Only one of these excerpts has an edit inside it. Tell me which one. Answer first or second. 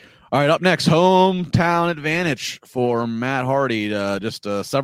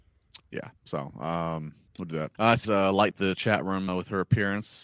second